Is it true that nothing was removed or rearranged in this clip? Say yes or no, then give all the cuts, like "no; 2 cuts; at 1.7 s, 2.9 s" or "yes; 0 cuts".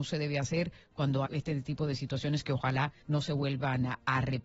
no; 2 cuts; at 1.2 s, 3.0 s